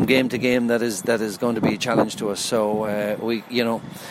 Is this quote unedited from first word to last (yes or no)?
yes